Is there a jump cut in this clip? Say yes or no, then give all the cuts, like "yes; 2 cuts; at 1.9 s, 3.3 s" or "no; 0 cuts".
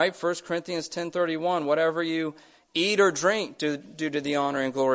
no; 0 cuts